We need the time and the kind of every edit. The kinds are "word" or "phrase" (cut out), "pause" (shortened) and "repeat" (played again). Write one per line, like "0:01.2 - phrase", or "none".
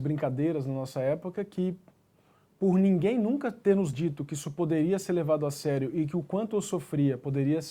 none